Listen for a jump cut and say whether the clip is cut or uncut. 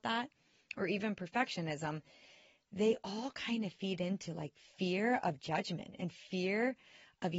uncut